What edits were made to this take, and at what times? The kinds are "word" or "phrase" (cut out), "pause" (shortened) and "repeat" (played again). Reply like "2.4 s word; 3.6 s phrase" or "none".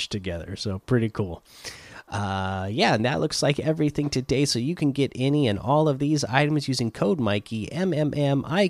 none